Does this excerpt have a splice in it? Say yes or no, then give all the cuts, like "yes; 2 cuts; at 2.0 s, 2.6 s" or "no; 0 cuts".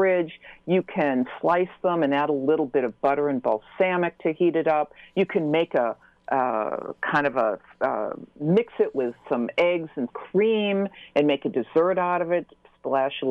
yes; 1 cut; at 10.1 s